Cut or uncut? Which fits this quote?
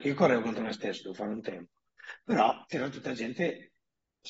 cut